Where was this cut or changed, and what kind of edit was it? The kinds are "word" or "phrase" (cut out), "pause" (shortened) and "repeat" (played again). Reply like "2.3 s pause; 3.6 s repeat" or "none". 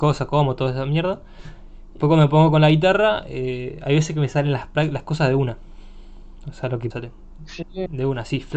2.0 s word; 6.9 s phrase

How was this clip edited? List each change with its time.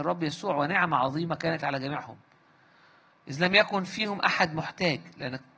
none

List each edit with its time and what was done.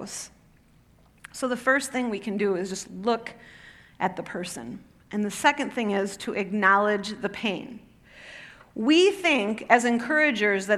none

